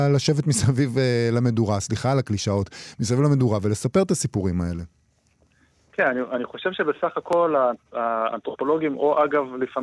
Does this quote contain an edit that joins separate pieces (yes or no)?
no